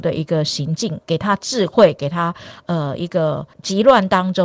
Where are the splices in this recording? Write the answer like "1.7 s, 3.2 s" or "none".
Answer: 3.5 s